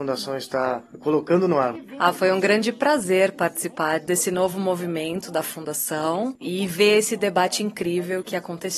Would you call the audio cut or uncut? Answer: uncut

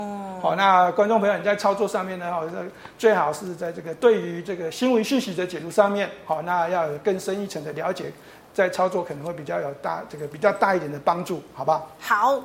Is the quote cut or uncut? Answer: uncut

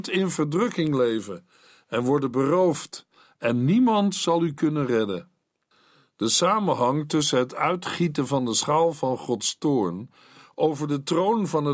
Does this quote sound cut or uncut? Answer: uncut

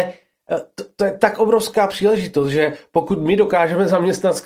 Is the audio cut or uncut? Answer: uncut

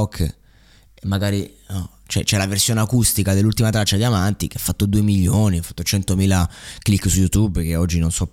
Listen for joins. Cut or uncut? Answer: uncut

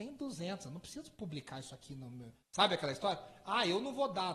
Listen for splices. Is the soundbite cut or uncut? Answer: cut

